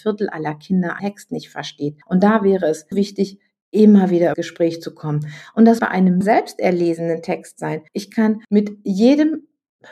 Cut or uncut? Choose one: cut